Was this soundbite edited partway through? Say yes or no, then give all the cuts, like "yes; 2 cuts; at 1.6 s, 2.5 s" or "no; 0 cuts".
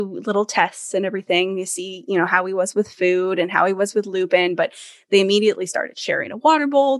no; 0 cuts